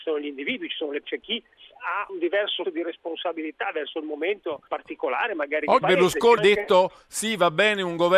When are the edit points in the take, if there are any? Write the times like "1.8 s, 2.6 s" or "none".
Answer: 1.0 s, 1.7 s, 2.1 s, 2.6 s, 4.7 s, 5.8 s, 6.4 s